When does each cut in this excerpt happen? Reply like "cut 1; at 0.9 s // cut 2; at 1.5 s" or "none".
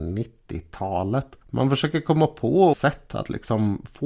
cut 1; at 1.4 s // cut 2; at 2.7 s

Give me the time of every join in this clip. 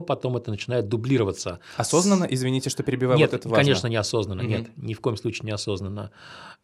none

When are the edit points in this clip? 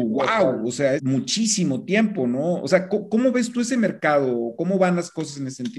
cut 1; at 1.0 s

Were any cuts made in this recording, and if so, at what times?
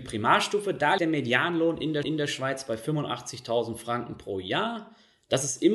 cut 1; at 1.0 s // cut 2; at 2.0 s

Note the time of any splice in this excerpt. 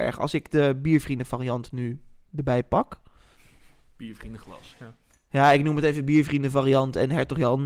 none

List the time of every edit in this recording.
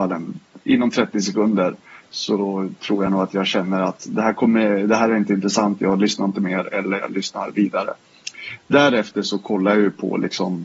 none

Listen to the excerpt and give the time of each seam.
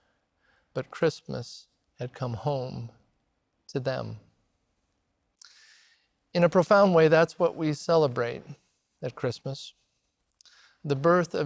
none

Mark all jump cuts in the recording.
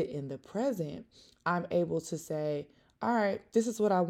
none

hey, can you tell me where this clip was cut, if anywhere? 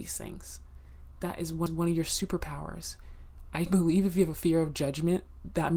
cut 1; at 1.7 s // cut 2; at 3.7 s

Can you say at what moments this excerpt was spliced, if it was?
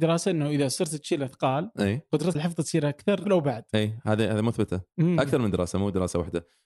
cut 1; at 2.3 s // cut 2; at 3.2 s

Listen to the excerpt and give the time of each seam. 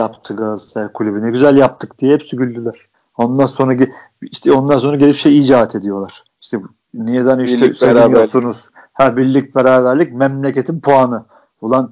none

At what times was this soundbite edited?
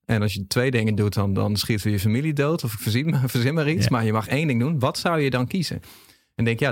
none

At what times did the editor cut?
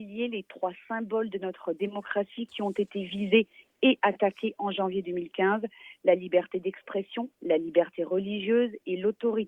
none

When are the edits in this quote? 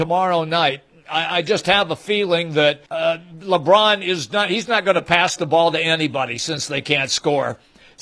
cut 1; at 2.9 s

